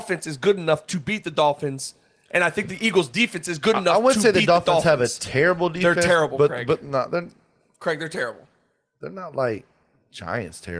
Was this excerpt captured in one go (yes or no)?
yes